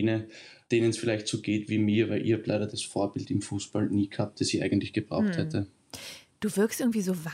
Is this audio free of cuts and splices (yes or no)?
yes